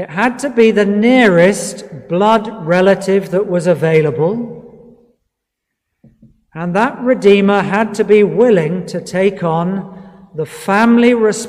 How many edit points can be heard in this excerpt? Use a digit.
0